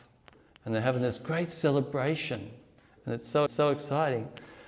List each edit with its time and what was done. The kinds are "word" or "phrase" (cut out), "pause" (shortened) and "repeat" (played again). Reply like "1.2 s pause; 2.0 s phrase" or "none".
3.5 s repeat